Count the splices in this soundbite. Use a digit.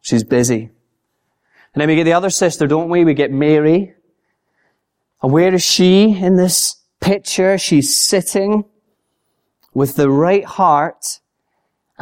0